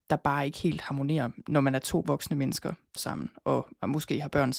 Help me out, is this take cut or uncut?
cut